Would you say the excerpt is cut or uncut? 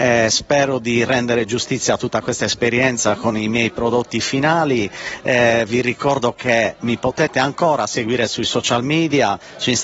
uncut